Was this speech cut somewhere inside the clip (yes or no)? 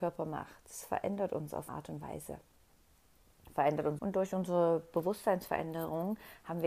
yes